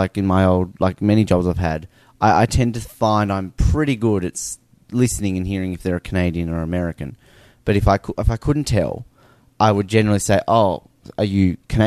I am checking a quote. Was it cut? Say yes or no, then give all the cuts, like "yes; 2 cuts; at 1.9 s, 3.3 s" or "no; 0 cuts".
no; 0 cuts